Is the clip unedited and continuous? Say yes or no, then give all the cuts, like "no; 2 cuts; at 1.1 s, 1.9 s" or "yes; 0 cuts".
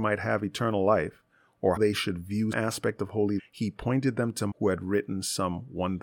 no; 4 cuts; at 1.8 s, 2.5 s, 3.4 s, 4.5 s